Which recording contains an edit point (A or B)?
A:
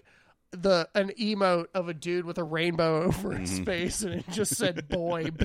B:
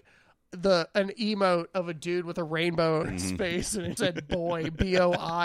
B